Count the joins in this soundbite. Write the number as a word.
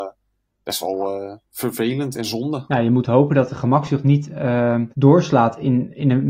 two